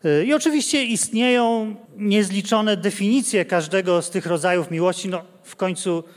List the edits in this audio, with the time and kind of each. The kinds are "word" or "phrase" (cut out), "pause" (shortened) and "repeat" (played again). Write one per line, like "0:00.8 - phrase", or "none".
0:01.9 - pause